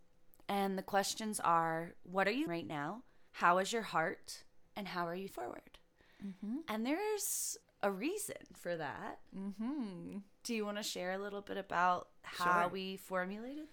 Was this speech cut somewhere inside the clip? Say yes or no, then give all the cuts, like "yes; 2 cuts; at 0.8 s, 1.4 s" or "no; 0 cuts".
yes; 5 cuts; at 2.5 s, 3.3 s, 4.7 s, 5.3 s, 7.6 s